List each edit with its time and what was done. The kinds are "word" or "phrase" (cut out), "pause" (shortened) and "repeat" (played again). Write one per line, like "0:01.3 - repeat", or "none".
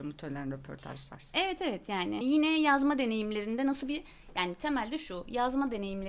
0:02.2 - word